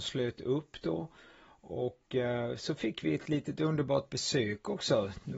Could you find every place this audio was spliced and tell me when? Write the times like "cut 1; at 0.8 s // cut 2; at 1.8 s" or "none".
none